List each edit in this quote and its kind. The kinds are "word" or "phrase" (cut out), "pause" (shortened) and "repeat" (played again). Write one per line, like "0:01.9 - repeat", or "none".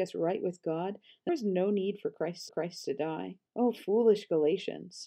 0:01.3 - word
0:02.5 - repeat
0:03.5 - pause